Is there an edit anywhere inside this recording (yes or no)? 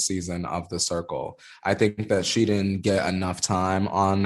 no